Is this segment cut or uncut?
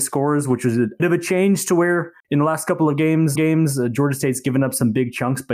cut